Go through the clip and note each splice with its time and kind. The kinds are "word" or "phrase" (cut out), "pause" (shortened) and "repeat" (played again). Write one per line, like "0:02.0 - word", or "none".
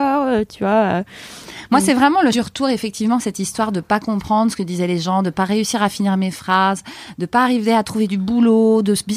0:02.3 - word